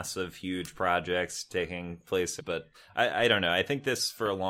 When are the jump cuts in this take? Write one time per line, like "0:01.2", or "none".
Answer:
0:02.4
0:02.7